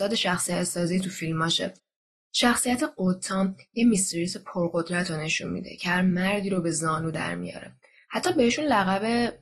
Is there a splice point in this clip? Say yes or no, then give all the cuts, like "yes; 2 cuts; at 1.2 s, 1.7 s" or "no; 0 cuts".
no; 0 cuts